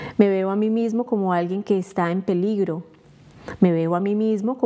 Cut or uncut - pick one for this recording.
uncut